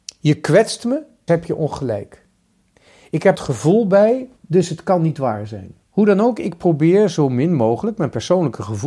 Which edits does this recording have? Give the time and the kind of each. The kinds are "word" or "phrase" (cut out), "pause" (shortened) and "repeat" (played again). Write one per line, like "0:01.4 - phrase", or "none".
0:01.3 - word
0:02.6 - pause
0:03.3 - phrase
0:04.4 - pause
0:05.8 - pause